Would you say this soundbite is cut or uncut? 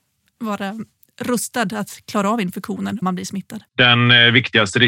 cut